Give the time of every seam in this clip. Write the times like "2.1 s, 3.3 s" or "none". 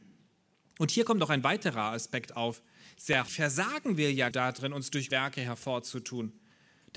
3.3 s, 4.3 s, 5.1 s